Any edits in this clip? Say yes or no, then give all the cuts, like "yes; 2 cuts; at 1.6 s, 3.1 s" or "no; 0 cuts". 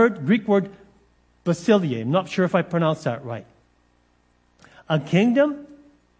no; 0 cuts